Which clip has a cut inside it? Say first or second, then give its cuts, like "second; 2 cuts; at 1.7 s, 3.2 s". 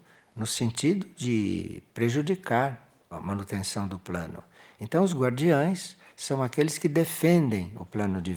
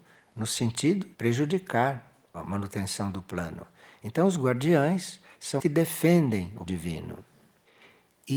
second; 3 cuts; at 1.1 s, 5.6 s, 6.7 s